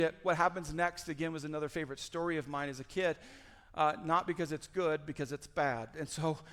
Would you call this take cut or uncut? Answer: uncut